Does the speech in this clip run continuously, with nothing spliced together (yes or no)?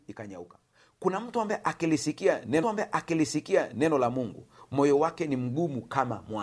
no